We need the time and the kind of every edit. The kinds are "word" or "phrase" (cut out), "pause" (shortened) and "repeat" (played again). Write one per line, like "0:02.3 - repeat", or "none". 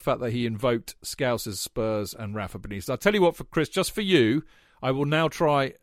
none